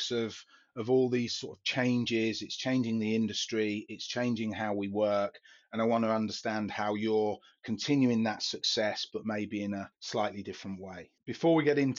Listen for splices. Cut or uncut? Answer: uncut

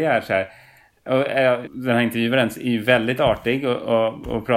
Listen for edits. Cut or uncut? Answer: cut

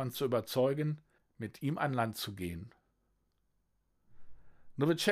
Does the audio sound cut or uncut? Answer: cut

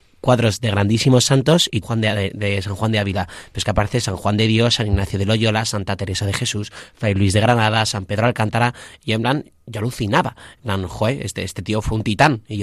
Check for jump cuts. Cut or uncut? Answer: cut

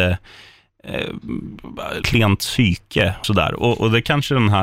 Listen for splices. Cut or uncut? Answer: cut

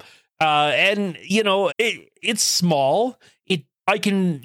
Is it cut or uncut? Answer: cut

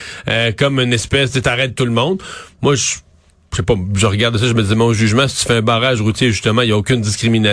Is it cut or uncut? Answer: uncut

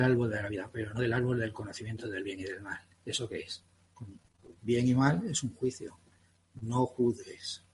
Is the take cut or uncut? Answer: uncut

